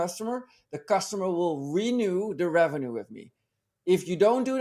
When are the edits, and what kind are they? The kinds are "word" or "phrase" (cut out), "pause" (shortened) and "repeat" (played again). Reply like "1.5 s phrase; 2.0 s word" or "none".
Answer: none